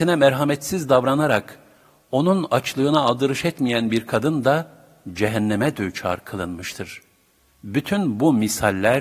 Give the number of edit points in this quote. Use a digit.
0